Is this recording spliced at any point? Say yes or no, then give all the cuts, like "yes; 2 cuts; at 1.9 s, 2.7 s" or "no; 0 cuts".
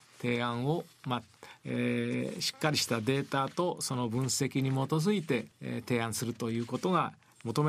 yes; 1 cut; at 5.5 s